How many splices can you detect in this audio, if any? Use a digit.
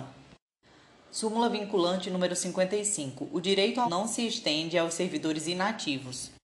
1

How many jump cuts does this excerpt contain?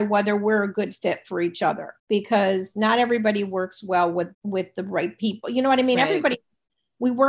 2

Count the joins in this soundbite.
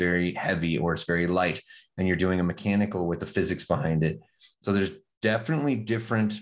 0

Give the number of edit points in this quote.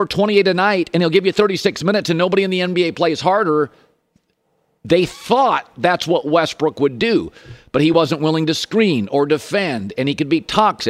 0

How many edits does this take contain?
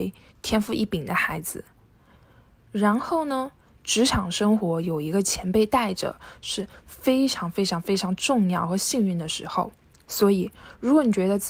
0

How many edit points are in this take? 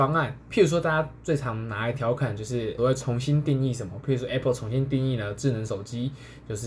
1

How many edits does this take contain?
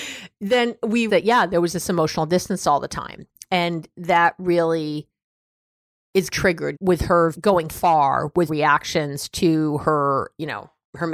6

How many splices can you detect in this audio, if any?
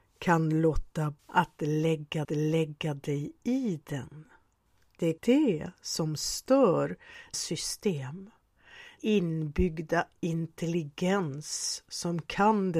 6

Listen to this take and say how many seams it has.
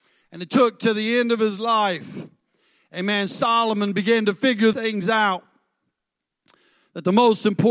1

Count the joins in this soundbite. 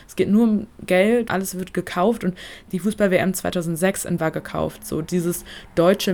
3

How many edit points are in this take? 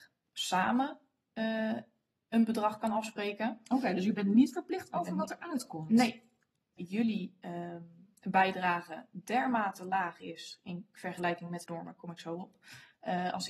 2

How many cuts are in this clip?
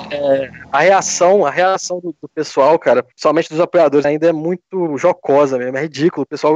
2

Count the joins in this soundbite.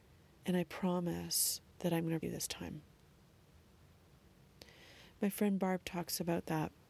2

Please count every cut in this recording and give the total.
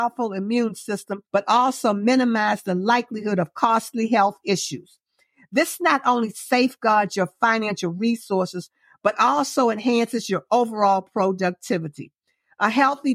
1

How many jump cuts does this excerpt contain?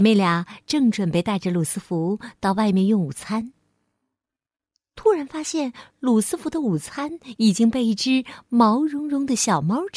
0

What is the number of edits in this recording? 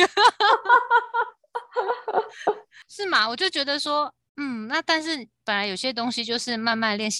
0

